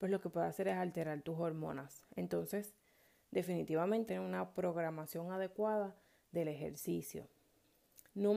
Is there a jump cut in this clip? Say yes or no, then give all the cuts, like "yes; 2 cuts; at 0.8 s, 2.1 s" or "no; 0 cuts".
yes; 1 cut; at 4.1 s